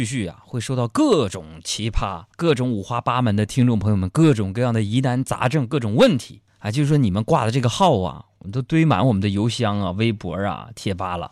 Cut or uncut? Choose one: cut